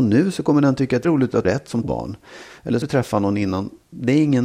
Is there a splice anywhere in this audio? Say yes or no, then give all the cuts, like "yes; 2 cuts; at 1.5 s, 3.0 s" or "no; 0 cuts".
yes; 4 cuts; at 1.0 s, 1.4 s, 1.8 s, 2.8 s